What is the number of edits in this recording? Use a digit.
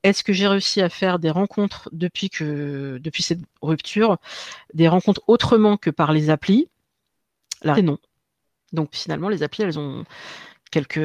2